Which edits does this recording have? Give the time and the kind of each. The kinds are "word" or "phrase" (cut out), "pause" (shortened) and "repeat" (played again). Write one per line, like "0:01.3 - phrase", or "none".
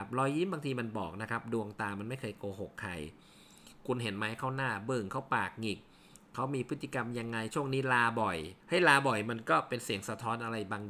0:08.6 - pause